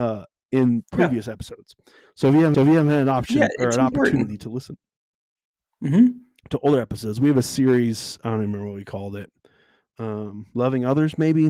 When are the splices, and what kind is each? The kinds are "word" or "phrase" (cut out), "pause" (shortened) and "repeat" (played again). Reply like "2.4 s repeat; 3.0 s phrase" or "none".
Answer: 2.5 s repeat